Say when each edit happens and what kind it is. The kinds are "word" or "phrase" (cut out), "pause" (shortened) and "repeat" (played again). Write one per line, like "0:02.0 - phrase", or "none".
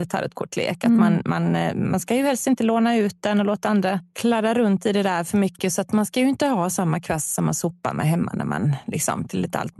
none